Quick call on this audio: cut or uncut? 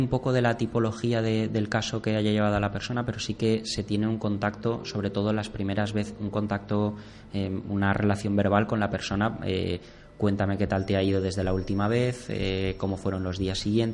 uncut